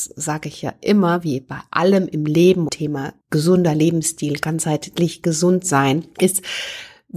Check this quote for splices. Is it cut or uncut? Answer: cut